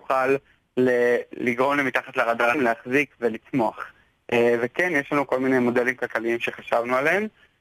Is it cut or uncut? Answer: cut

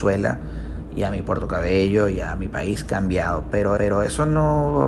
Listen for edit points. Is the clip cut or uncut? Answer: cut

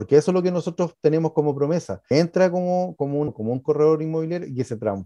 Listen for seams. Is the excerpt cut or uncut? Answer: cut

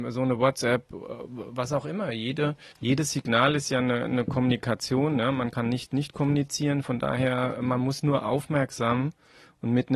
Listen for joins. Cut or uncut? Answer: cut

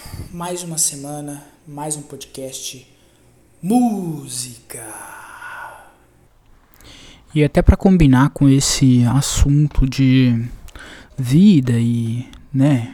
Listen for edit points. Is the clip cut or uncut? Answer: uncut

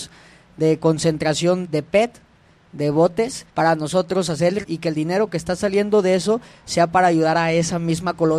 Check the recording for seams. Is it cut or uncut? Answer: cut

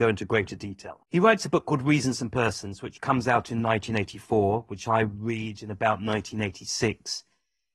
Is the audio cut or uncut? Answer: cut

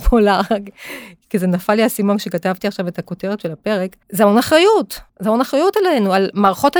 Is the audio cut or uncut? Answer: cut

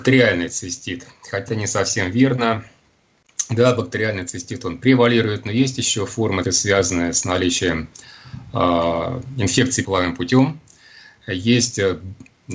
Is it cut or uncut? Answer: cut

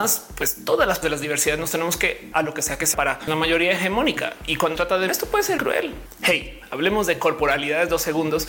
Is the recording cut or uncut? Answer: cut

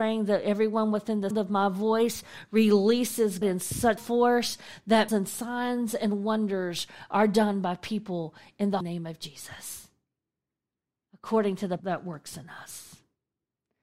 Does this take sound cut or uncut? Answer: cut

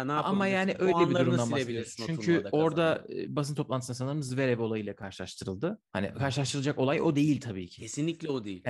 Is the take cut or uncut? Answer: cut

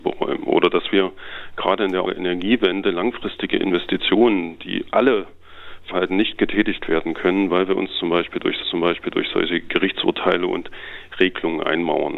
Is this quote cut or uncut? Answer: cut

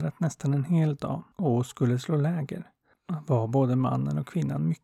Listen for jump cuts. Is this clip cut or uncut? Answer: cut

